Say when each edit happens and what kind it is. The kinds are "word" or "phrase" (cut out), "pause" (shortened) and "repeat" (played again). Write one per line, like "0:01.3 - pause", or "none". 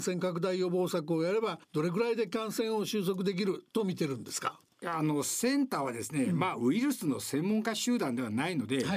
0:01.6 - pause